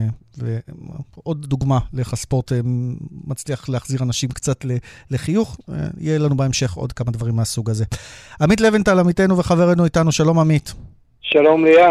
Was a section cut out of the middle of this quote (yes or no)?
no